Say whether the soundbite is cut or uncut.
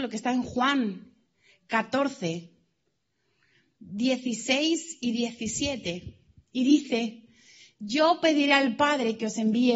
uncut